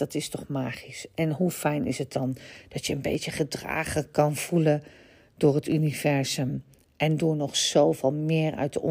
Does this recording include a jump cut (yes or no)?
no